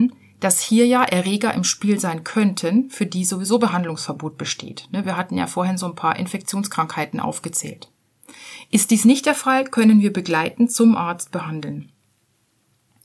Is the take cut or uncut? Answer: uncut